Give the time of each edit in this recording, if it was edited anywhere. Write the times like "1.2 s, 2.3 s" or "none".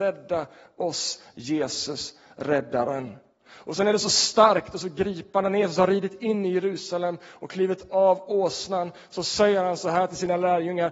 none